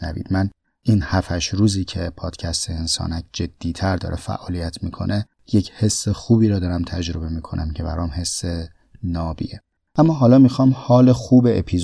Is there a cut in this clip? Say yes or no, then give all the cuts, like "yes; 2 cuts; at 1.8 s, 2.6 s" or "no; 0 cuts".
no; 0 cuts